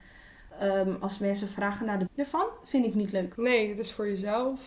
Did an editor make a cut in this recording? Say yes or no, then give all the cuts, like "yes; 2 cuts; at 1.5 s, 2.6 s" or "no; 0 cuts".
yes; 1 cut; at 2.1 s